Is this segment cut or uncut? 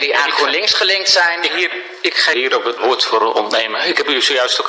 cut